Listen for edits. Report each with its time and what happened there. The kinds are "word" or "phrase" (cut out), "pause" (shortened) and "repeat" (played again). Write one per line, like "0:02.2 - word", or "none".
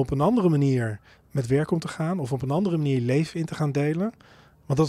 none